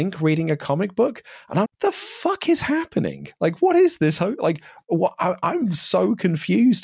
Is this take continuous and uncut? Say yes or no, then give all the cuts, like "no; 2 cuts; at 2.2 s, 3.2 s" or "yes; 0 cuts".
no; 1 cut; at 1.7 s